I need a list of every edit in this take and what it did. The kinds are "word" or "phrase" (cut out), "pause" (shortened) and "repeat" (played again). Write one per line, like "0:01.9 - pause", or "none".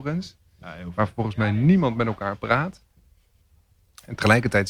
none